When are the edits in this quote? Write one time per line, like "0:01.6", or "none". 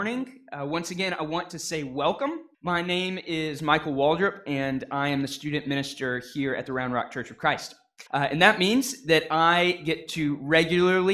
0:02.5
0:08.1